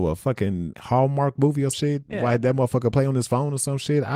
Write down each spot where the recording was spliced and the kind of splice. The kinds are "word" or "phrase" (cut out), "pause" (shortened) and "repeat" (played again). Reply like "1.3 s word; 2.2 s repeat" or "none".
1.7 s word